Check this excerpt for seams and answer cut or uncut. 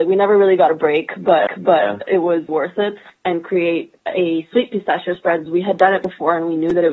cut